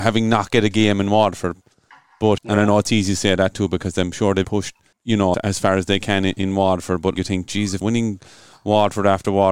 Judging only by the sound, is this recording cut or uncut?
cut